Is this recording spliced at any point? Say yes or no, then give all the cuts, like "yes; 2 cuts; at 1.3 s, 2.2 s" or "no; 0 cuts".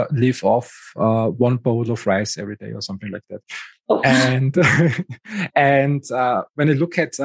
no; 0 cuts